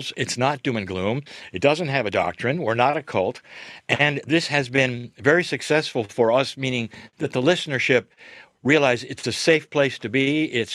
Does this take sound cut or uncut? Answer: uncut